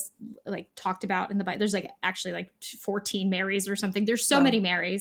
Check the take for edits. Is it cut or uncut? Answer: uncut